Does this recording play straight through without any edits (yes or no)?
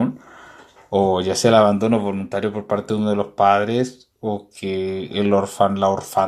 yes